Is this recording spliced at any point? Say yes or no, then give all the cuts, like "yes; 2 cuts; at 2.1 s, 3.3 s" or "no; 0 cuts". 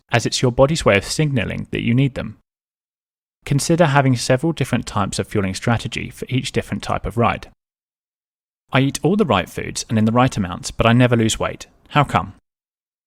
no; 0 cuts